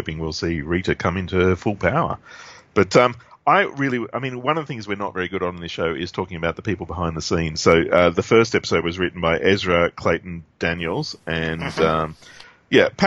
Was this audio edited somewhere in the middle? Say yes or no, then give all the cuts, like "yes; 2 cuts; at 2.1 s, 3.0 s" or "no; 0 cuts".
no; 0 cuts